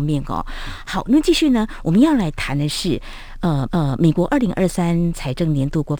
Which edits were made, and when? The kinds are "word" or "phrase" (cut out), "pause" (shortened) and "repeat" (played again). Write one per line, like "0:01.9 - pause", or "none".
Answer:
0:03.7 - repeat